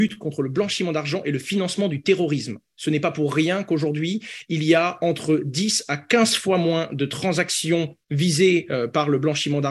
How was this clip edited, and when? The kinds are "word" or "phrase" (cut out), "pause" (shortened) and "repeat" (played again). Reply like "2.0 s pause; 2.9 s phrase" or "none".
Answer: 8.0 s pause